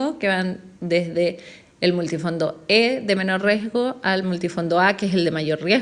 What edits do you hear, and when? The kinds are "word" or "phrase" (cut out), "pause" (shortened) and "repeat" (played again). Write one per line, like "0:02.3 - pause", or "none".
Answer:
none